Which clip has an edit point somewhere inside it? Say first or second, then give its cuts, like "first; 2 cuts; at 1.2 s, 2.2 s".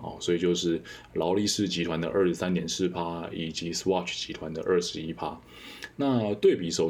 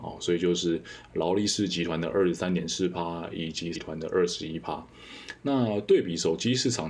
second; 1 cut; at 3.7 s